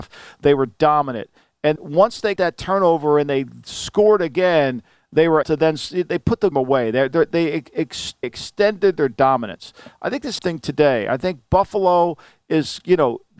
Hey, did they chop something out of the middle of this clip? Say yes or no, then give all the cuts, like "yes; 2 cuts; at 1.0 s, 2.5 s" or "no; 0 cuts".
yes; 6 cuts; at 1.8 s, 2.4 s, 5.4 s, 6.5 s, 8.2 s, 10.4 s